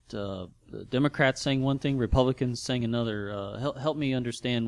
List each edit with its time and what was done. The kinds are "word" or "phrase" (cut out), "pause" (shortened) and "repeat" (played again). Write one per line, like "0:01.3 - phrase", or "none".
none